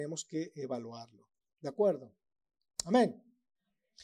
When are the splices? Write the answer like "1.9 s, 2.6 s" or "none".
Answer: none

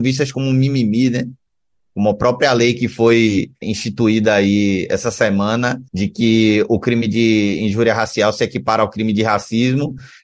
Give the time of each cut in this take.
3.6 s, 5.9 s

